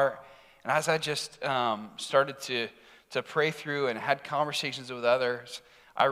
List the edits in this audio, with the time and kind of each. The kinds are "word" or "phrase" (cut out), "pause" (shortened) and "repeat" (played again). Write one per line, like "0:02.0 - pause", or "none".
none